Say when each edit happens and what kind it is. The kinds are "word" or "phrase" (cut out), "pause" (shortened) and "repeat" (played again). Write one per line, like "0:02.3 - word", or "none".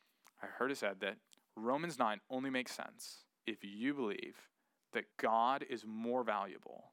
0:03.3 - pause
0:05.1 - pause